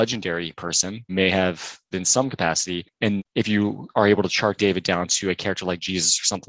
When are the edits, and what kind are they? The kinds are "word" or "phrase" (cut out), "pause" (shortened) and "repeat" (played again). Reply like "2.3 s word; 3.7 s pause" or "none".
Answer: 1.1 s word; 1.9 s word; 3.2 s word; 4.6 s word